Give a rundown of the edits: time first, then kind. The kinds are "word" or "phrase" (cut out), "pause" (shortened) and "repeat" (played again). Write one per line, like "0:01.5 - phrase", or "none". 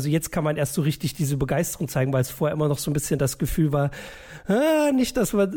none